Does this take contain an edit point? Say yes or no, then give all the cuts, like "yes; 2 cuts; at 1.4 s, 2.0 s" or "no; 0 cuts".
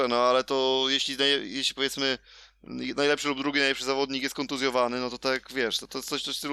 no; 0 cuts